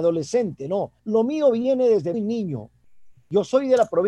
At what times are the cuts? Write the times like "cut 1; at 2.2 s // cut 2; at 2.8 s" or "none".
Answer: cut 1; at 1.0 s // cut 2; at 2.1 s